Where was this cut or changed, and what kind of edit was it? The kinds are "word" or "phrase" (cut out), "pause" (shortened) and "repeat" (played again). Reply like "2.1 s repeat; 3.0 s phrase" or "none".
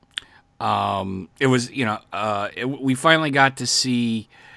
1.3 s pause